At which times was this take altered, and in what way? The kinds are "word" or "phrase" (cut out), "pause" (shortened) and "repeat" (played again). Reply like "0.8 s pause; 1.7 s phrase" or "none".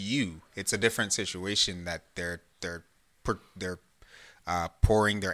none